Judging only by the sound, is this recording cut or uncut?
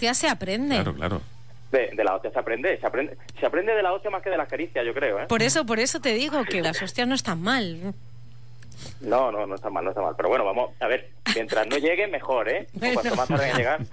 cut